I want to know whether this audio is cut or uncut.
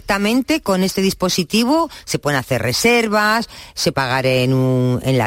cut